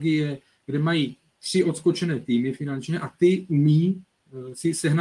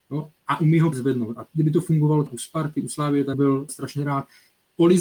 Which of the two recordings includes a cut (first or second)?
second